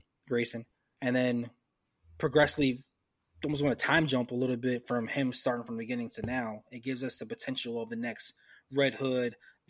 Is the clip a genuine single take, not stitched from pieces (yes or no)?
yes